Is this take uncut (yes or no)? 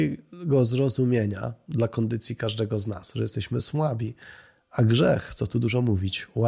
yes